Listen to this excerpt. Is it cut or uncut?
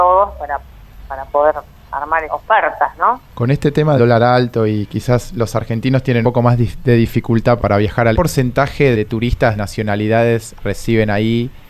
cut